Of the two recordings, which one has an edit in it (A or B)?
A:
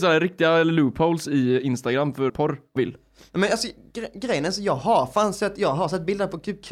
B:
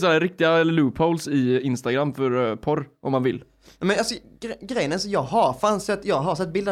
A